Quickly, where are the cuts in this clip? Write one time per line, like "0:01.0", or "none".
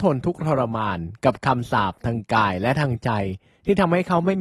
none